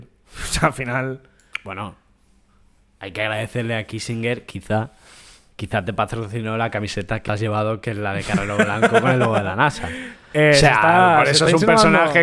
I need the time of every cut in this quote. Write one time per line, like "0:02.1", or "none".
0:07.3